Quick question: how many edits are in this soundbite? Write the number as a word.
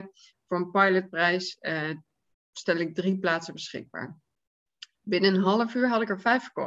zero